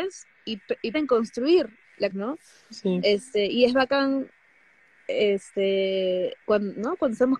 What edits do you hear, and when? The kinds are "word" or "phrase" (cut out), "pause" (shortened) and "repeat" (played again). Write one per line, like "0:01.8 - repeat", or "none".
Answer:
0:00.9 - word
0:02.1 - phrase
0:06.4 - pause